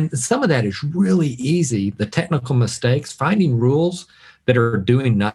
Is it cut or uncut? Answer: uncut